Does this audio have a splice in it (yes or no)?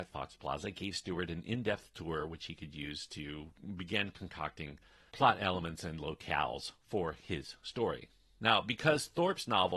no